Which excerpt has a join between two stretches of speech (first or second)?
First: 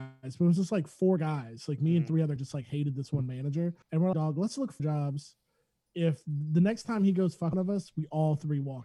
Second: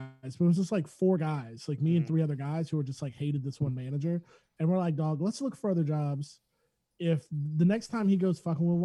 first